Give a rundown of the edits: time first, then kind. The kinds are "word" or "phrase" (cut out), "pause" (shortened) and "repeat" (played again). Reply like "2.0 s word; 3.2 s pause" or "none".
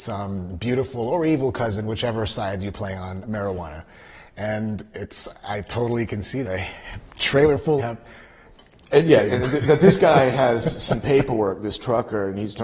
3.2 s word; 6.4 s word; 7.8 s word

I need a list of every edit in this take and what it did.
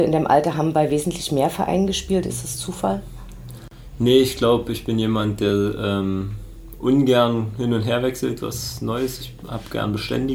none

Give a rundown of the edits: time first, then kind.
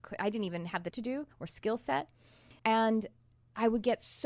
0.9 s word; 1.3 s pause; 2.6 s pause

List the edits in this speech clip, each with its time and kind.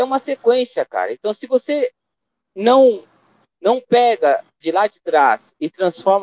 4.6 s phrase

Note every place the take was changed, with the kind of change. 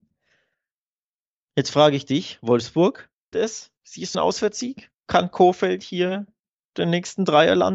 3.3 s word; 4.1 s word

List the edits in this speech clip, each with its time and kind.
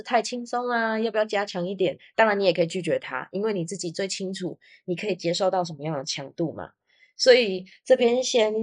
none

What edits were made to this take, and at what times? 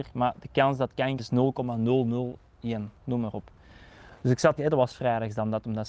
1.2 s word; 3.0 s pause; 4.6 s word

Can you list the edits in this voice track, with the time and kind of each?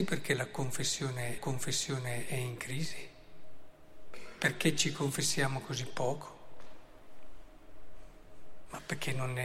1.4 s repeat

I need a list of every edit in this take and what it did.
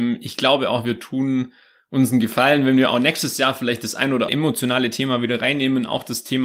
4.3 s word

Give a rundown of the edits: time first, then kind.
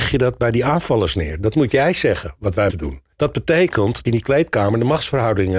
2.7 s word; 3.1 s pause; 4.1 s phrase

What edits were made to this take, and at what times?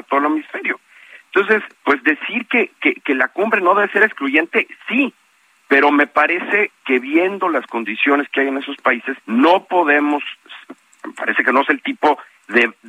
1.7 s pause; 9.2 s pause

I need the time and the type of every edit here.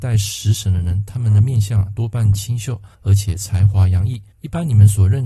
2.9 s pause; 4.3 s pause

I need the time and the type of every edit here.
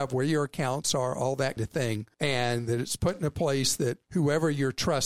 1.6 s word; 2.1 s pause; 4.0 s pause

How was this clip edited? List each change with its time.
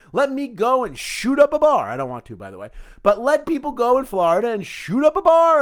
none

